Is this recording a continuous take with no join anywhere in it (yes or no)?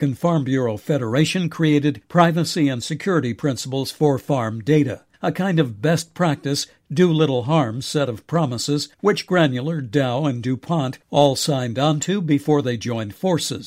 no